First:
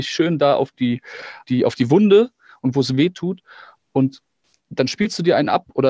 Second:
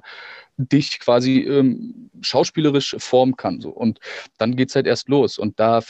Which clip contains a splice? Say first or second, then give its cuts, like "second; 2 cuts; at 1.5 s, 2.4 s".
first; 1 cut; at 1.4 s